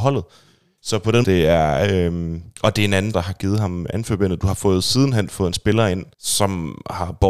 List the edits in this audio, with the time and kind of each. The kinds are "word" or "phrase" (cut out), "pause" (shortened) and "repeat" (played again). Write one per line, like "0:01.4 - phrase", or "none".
0:01.2 - phrase
0:02.5 - pause
0:03.1 - word
0:06.1 - pause